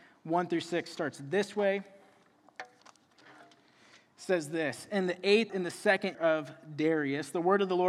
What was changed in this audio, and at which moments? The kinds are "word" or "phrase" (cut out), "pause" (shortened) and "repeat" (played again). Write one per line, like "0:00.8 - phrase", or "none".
0:05.5 - word
0:06.1 - word